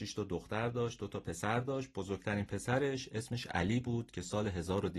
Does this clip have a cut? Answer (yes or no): no